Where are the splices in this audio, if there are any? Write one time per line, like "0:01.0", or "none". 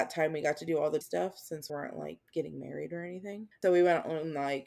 0:01.0
0:01.7
0:02.2
0:03.5